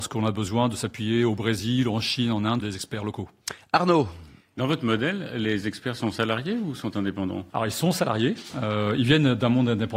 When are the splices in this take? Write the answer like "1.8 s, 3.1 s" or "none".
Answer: 2.6 s, 7.5 s